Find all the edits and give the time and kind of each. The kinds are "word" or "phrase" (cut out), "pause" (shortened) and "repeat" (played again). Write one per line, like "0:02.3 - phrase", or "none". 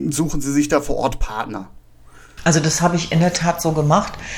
none